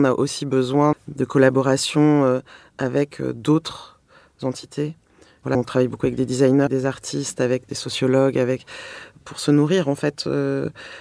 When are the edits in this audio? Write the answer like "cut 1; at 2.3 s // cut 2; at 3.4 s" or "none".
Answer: cut 1; at 0.9 s // cut 2; at 5.5 s // cut 3; at 6.7 s // cut 4; at 9.2 s